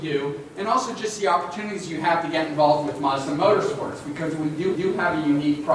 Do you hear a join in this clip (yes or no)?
yes